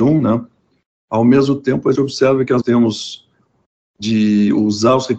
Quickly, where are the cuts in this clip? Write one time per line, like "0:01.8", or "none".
0:01.9
0:02.6